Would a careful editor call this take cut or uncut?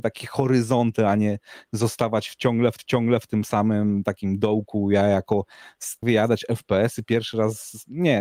cut